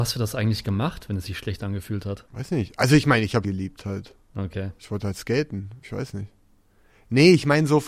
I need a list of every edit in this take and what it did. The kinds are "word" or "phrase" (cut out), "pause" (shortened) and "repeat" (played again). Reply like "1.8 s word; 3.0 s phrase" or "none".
2.3 s pause; 3.4 s word; 4.2 s pause